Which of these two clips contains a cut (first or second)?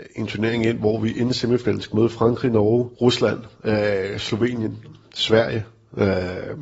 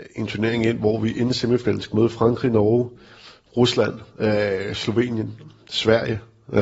first